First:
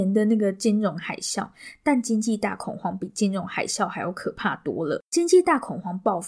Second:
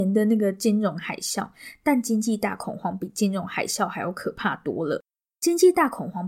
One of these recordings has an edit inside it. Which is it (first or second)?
first